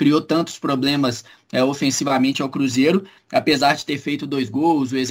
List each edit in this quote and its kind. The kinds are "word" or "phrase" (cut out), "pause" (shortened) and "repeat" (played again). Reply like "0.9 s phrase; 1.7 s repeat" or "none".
none

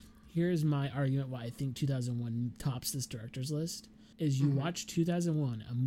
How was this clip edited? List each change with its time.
4.1 s pause

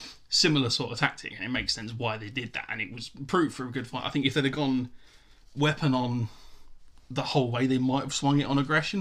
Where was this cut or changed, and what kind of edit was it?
none

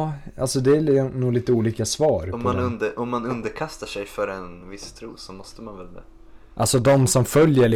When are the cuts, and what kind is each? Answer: none

